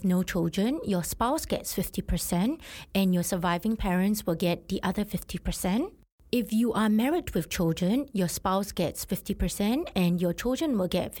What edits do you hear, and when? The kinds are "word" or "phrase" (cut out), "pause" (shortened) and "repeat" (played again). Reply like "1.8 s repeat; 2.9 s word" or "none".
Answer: none